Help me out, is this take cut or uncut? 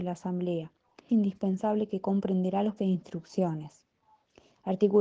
cut